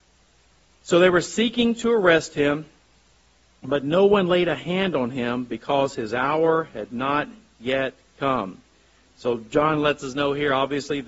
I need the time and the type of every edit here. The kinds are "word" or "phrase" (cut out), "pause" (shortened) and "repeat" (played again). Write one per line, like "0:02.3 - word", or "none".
none